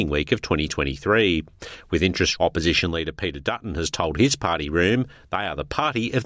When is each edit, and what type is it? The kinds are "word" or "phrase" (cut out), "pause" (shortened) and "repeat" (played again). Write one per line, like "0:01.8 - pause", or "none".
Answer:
0:02.4 - phrase